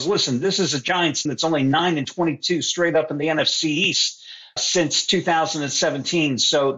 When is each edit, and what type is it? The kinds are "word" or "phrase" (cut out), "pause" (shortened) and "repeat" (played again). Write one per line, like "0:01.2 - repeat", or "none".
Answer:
0:01.3 - word
0:04.6 - word

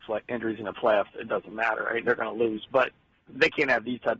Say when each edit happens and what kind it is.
0:03.3 - word

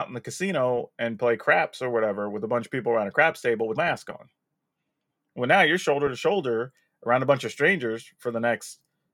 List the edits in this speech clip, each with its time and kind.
0:03.8 - word

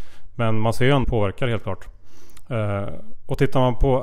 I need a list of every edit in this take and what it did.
0:01.0 - phrase

